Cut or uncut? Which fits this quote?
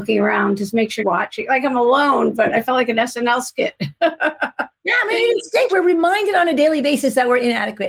cut